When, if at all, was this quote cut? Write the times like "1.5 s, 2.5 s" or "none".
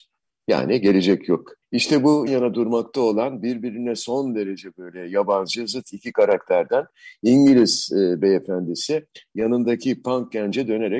1.6 s, 2.3 s